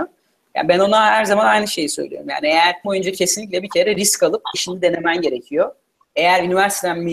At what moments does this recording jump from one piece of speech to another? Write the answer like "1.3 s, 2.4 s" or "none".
2.8 s, 4.5 s